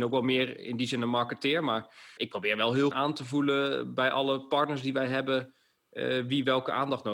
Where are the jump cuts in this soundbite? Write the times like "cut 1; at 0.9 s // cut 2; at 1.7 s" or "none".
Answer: cut 1; at 2.2 s // cut 2; at 2.9 s